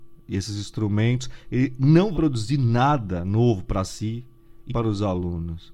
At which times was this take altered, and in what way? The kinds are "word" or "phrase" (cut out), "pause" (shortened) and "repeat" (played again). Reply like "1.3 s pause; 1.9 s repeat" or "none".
2.1 s word; 4.7 s word